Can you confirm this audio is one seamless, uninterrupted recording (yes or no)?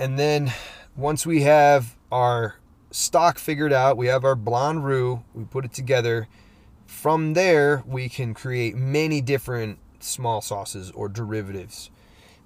no